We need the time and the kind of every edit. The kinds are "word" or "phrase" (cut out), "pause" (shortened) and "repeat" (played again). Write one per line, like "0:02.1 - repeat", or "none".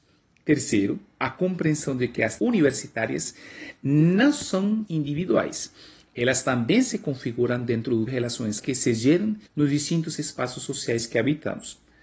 0:02.4 - word
0:04.9 - word
0:08.1 - word
0:08.6 - word
0:09.5 - pause